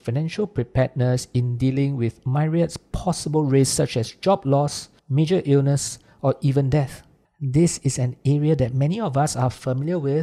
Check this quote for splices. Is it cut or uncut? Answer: cut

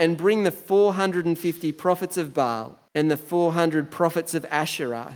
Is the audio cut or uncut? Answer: cut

